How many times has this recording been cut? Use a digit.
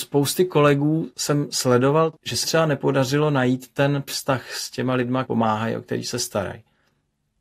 3